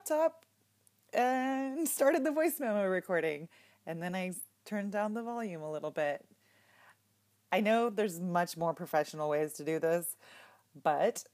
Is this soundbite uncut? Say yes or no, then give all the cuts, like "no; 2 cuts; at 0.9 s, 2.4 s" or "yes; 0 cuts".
yes; 0 cuts